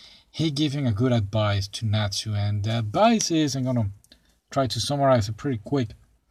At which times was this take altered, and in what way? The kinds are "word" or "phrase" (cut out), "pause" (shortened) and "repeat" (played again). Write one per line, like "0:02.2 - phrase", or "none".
none